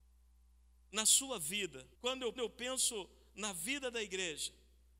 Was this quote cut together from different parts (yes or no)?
yes